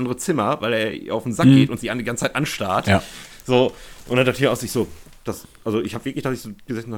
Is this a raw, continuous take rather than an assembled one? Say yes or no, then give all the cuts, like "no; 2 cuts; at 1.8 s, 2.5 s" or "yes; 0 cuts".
yes; 0 cuts